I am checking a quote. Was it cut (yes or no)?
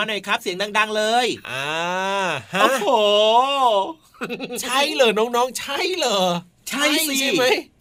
no